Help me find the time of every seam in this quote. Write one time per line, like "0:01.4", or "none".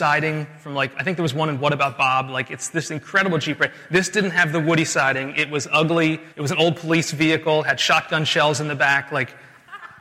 0:06.3